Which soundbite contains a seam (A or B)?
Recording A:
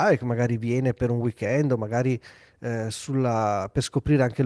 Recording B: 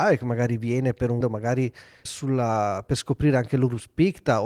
B